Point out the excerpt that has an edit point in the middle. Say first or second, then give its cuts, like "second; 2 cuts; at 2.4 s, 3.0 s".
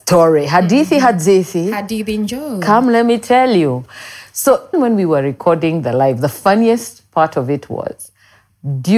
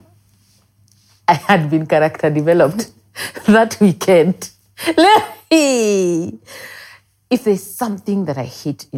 first; 1 cut; at 4.7 s